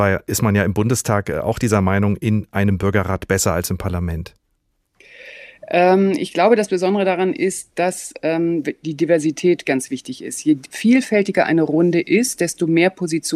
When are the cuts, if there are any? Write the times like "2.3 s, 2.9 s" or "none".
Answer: 8.6 s